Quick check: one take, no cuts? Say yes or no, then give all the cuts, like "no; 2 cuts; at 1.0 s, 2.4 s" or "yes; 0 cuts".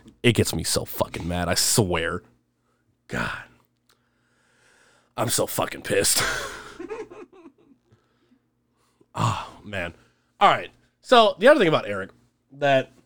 yes; 0 cuts